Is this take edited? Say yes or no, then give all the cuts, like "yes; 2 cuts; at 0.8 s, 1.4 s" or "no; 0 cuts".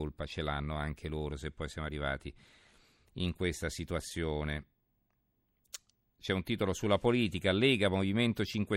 no; 0 cuts